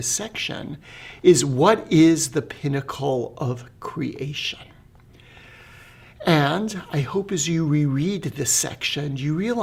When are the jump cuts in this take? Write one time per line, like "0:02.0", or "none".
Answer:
none